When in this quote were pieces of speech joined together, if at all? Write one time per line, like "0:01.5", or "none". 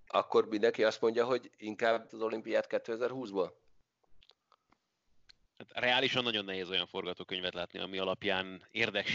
0:02.1